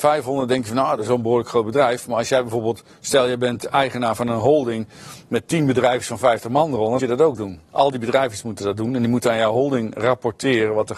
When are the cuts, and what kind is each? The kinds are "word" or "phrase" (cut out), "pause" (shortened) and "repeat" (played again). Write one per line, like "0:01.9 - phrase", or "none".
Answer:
0:07.0 - phrase
0:07.7 - pause